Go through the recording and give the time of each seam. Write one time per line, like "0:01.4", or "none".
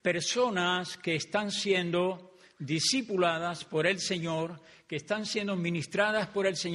none

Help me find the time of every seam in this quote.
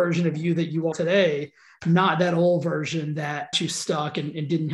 0:00.9
0:03.5

